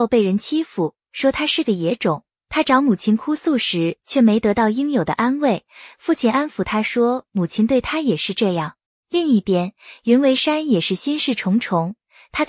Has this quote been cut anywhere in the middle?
yes; 1 cut; at 8.9 s

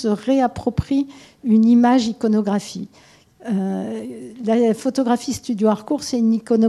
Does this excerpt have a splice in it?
no; 0 cuts

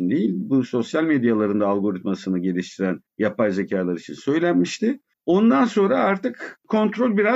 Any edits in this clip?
yes; 2 cuts; at 3.1 s, 5.1 s

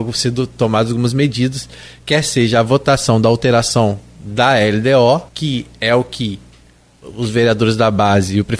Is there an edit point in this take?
yes; 1 cut; at 5.3 s

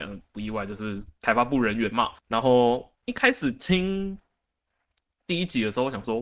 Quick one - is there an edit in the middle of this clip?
yes; 2 cuts; at 2.2 s, 2.9 s

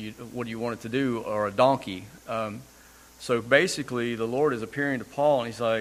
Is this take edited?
no; 0 cuts

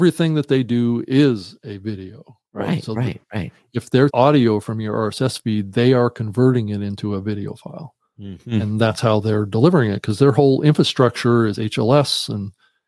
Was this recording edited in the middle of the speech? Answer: yes; 1 cut; at 4.1 s

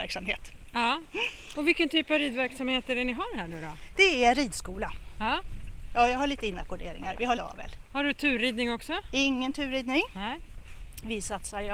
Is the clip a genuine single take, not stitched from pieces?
no; 1 cut; at 7.4 s

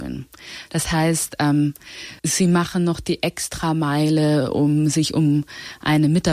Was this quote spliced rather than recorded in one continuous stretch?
yes; 1 cut; at 2.2 s

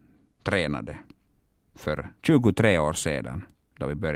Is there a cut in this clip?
no; 0 cuts

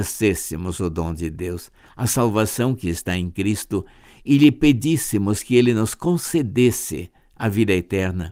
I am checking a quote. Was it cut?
no; 0 cuts

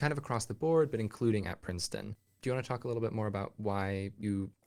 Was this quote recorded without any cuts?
yes; 0 cuts

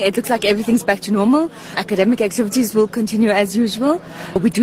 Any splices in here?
no; 0 cuts

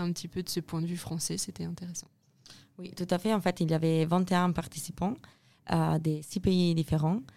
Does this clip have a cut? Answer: no; 0 cuts

